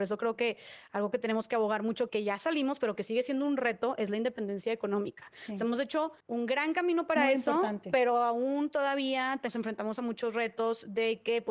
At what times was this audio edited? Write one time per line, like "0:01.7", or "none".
0:02.1
0:06.2